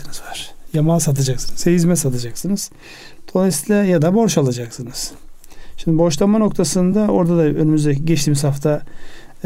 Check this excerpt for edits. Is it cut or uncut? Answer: uncut